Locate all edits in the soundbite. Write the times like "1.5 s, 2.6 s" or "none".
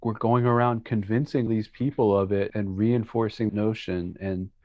1.5 s, 2.5 s, 3.5 s